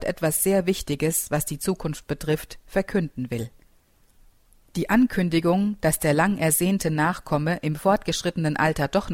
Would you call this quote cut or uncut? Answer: uncut